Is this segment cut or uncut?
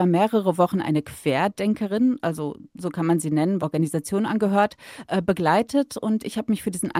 cut